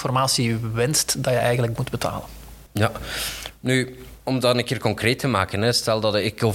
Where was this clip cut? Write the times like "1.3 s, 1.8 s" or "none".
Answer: 1.8 s, 2.7 s